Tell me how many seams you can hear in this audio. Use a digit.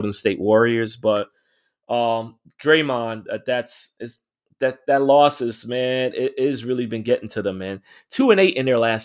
0